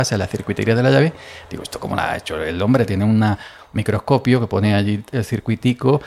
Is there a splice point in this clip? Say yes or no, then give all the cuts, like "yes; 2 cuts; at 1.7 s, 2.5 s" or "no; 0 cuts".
no; 0 cuts